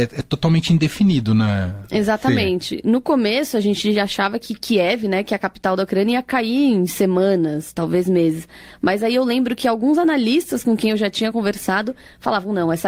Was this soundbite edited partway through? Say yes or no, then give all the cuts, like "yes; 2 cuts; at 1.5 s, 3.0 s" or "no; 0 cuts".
no; 0 cuts